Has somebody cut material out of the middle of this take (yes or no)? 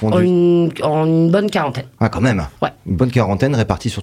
yes